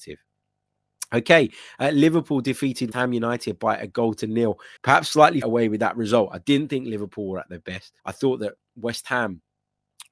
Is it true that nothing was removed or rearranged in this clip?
no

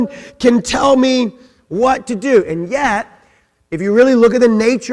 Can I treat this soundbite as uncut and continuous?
yes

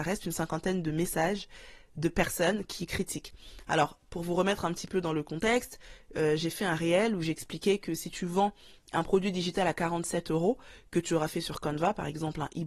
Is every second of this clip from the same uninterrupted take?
yes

